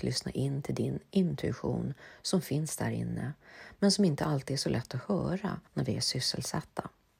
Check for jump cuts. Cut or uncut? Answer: cut